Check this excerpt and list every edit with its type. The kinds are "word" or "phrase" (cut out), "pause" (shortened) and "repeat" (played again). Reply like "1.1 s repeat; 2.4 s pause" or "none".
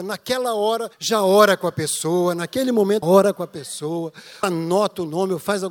0.9 s pause; 3.0 s word; 4.4 s word

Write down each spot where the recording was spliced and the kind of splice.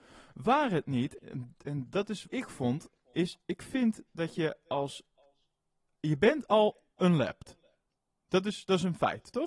1.2 s word; 2.3 s word

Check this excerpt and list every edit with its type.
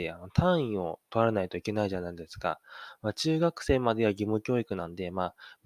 none

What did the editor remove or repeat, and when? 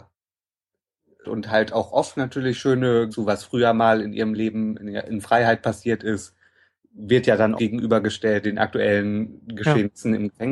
1.2 s word; 3.1 s word; 7.6 s word; 8.4 s word

